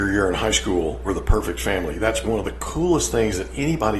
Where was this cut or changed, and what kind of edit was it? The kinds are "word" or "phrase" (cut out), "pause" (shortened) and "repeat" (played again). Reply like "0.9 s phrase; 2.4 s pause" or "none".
1.0 s word; 2.2 s word